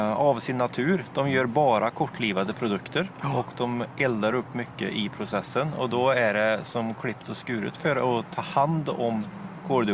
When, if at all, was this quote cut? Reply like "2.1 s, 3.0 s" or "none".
none